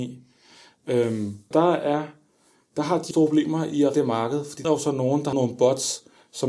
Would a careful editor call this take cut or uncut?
cut